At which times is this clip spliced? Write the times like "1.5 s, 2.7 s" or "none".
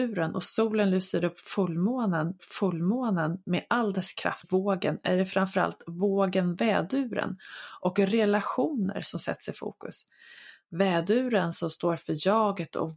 2.4 s, 4.4 s